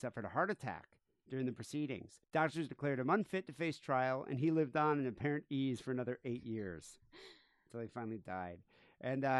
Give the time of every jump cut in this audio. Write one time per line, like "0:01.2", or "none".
0:02.2